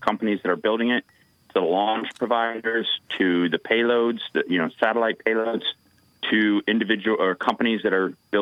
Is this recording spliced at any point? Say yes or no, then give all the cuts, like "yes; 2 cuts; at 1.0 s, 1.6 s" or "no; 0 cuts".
no; 0 cuts